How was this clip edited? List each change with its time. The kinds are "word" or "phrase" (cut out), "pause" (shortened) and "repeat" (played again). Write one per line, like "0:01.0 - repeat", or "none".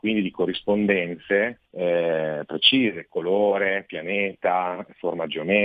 0:01.7 - pause